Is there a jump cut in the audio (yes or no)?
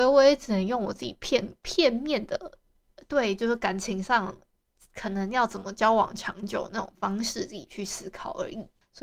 no